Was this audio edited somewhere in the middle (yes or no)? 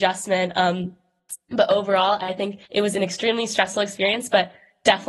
yes